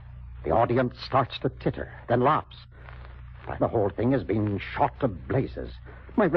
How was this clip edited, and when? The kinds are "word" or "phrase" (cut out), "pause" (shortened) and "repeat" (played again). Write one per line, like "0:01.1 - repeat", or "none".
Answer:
0:03.6 - word